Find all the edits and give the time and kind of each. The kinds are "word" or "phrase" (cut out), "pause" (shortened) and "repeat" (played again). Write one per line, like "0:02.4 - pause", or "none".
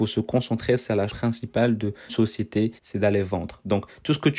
0:01.1 - word
0:02.1 - word
0:02.8 - pause